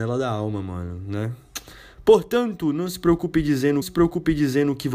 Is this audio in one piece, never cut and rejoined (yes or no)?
no